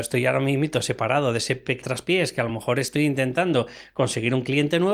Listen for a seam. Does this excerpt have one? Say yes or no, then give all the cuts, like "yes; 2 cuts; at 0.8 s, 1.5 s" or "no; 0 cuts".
no; 0 cuts